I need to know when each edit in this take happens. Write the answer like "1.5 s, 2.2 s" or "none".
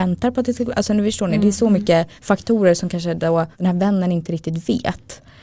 2.2 s, 3.5 s